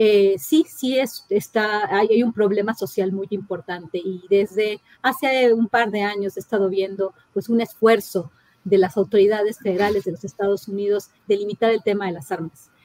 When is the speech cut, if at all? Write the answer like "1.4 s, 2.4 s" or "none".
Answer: none